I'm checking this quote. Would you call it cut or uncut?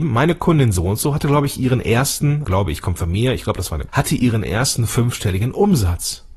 cut